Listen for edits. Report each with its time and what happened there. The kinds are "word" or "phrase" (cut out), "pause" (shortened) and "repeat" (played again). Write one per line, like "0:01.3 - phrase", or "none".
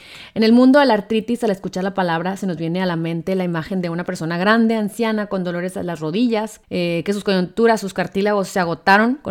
0:06.6 - pause